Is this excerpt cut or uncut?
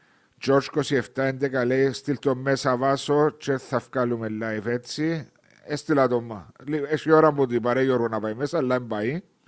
uncut